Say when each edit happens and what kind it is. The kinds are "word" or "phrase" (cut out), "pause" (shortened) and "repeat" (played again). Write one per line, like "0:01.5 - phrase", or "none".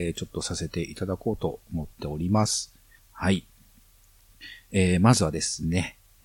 0:01.6 - pause
0:03.0 - pause